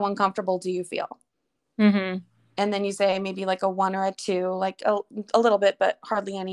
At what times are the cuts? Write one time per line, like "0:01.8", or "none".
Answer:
none